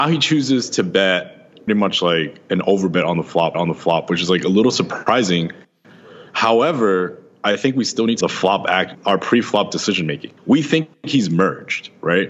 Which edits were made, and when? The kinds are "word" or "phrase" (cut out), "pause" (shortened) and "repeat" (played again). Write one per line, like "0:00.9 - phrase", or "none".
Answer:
0:01.7 - word
0:03.5 - repeat
0:08.2 - phrase
0:08.9 - word
0:10.4 - pause